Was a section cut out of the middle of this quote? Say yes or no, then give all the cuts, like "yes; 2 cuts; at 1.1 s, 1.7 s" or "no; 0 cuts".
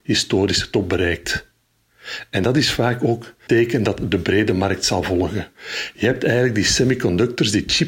yes; 1 cut; at 3.5 s